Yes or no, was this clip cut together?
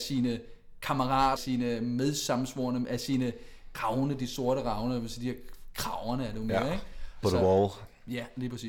yes